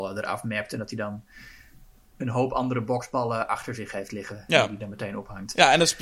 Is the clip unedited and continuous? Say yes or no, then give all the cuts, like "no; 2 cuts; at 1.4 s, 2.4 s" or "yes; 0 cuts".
yes; 0 cuts